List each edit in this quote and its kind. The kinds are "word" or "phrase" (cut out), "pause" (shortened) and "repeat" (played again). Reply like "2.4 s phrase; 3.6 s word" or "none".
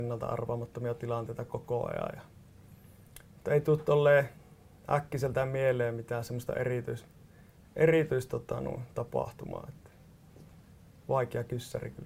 none